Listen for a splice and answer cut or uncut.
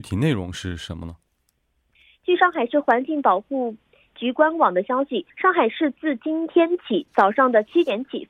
cut